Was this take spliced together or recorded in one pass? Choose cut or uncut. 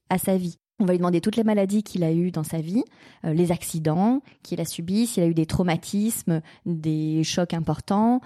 uncut